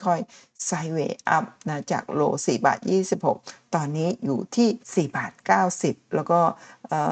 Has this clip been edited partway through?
yes; 1 cut; at 4.8 s

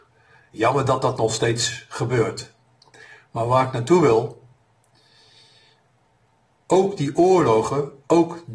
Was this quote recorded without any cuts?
yes; 0 cuts

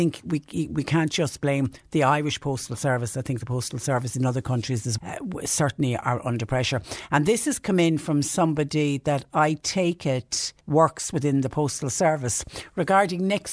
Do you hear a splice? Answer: yes; 2 cuts; at 5.0 s, 10.6 s

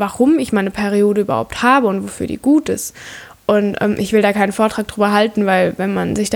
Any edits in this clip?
no; 0 cuts

